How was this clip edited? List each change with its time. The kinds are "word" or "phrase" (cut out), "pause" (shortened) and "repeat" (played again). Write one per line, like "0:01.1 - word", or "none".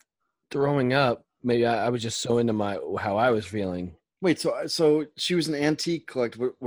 0:05.1 - pause